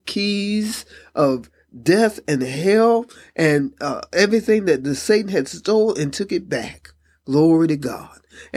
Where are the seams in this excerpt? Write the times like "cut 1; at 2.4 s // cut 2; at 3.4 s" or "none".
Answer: none